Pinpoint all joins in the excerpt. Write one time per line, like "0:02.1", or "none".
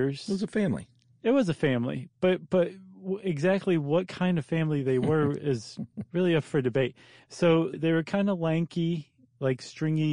0:07.7

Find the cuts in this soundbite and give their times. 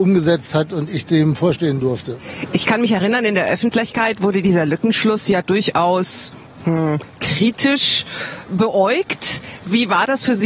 none

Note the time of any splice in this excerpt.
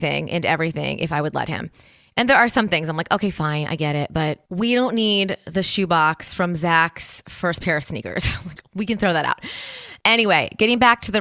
none

